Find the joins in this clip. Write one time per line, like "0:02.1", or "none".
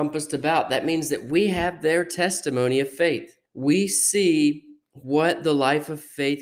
0:03.5

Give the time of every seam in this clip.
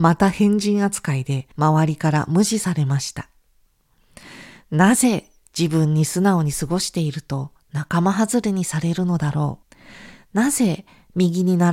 0:01.5
0:09.6

